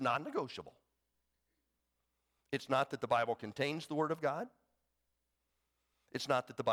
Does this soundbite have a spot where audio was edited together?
no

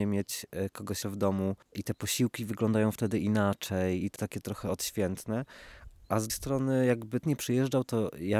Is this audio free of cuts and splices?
no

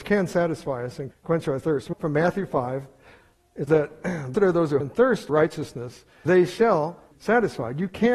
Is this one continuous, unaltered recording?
no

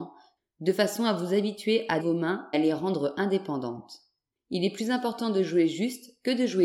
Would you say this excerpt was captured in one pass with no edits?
no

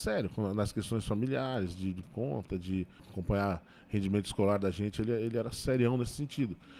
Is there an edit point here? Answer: yes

